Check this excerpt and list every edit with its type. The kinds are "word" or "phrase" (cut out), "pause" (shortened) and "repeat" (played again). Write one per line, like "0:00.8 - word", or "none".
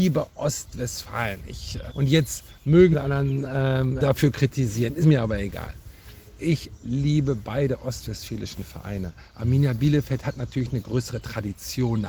0:01.9 - word
0:02.9 - phrase
0:04.0 - word
0:05.0 - word